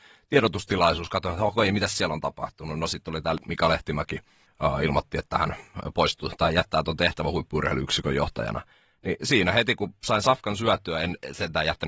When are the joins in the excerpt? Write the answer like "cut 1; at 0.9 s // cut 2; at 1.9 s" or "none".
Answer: cut 1; at 4.5 s